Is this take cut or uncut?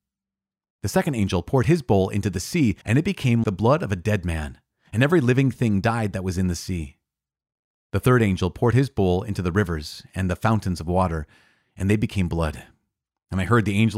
cut